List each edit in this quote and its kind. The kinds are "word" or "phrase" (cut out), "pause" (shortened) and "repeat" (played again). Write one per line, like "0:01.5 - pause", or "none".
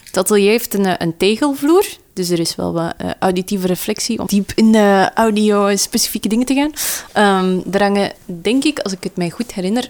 0:04.3 - word